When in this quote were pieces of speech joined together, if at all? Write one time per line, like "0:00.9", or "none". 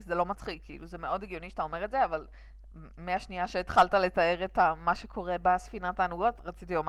none

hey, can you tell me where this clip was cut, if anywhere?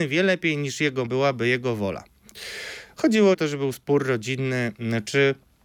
0:01.1
0:03.3

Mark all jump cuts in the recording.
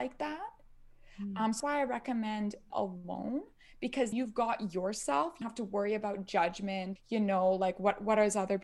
0:01.6
0:02.7
0:04.1
0:05.4
0:07.0

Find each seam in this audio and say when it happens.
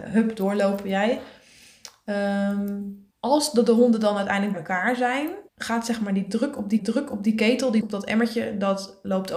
0:03.1
0:04.5
0:05.5
0:06.8
0:07.8

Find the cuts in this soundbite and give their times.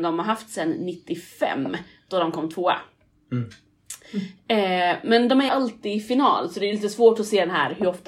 0:05.5

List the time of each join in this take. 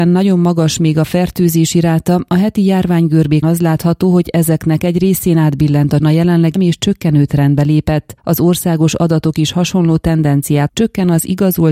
0:03.4
0:06.0
0:06.6
0:08.2
0:10.7

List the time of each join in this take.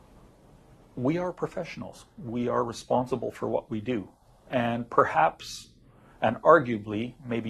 none

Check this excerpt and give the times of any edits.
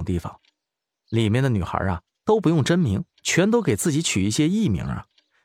0:03.1

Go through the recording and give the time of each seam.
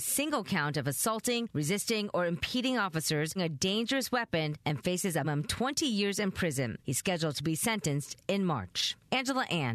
0:03.4
0:05.2

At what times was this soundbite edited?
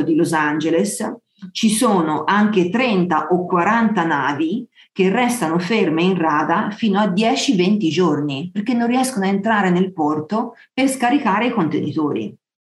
none

